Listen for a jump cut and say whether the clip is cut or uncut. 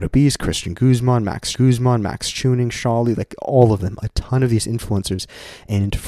cut